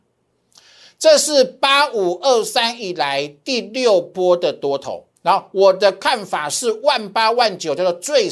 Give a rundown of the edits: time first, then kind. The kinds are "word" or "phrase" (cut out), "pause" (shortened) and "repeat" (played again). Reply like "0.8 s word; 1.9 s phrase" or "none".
5.2 s pause